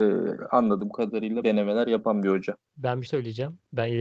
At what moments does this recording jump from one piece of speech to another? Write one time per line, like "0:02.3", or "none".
0:01.4
0:02.7
0:03.1